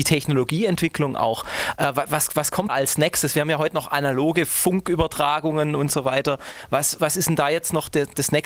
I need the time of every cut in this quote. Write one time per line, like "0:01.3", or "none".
0:02.7
0:07.0